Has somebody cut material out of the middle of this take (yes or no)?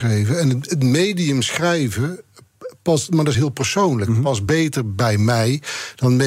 no